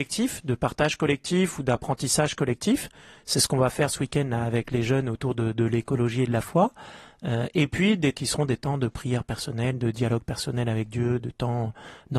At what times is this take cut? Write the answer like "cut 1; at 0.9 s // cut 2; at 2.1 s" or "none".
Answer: cut 1; at 8.1 s